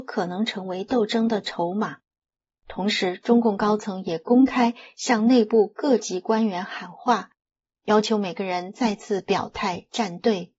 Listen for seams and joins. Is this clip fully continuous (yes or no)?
yes